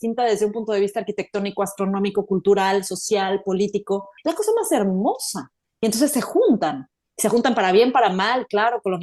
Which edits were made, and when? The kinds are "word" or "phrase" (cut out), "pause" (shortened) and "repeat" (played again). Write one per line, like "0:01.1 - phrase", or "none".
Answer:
0:04.2 - pause
0:05.6 - pause